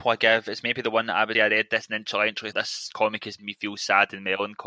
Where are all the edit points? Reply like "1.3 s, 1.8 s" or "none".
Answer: 1.3 s, 2.5 s, 3.4 s